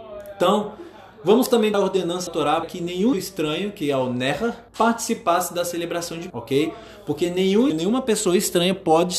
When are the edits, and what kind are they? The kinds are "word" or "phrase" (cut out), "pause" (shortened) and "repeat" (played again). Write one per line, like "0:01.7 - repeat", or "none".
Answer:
0:01.7 - word
0:02.3 - word
0:02.6 - word
0:03.1 - word
0:04.7 - pause
0:06.3 - word
0:07.7 - word